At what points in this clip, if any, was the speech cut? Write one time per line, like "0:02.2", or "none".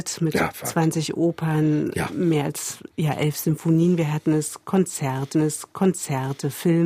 0:05.3